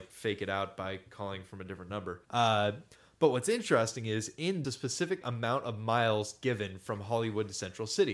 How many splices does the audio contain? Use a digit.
3